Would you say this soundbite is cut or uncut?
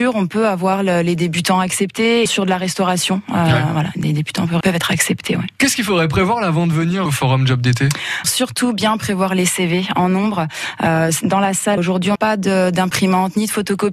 cut